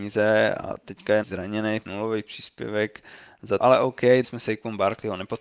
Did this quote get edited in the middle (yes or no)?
yes